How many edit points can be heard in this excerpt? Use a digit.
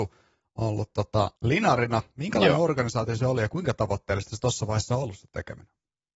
1